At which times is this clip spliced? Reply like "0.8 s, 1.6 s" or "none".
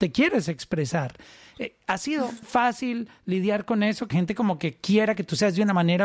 2.4 s, 4.1 s